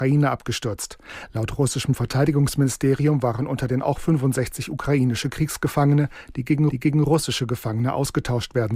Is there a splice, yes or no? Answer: yes